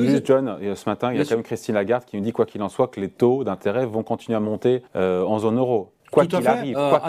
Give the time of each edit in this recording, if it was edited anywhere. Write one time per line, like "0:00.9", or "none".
0:04.9
0:06.0